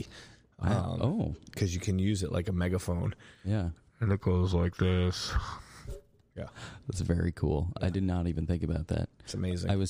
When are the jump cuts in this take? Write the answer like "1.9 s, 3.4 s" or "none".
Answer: none